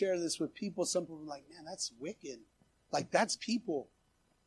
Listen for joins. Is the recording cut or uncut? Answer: cut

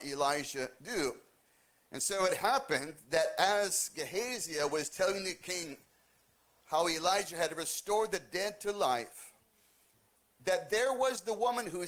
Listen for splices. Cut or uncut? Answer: uncut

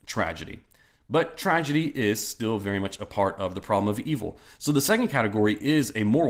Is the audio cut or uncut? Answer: uncut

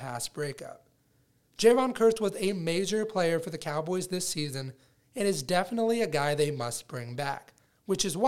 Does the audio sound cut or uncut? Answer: uncut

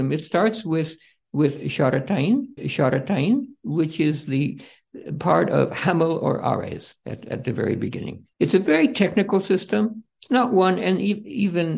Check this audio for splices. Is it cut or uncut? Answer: cut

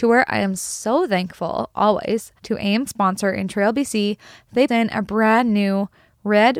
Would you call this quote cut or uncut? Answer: cut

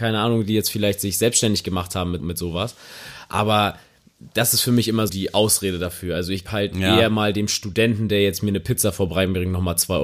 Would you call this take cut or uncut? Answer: cut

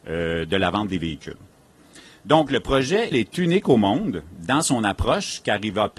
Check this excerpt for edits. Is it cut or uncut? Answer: cut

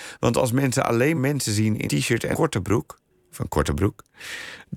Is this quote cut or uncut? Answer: cut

